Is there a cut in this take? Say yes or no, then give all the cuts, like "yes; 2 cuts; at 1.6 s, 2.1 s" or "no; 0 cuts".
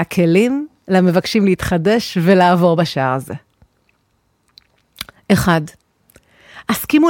no; 0 cuts